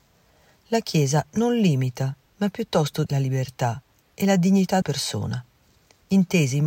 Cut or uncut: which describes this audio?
cut